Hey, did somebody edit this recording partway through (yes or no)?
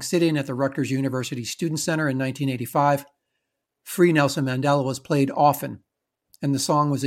no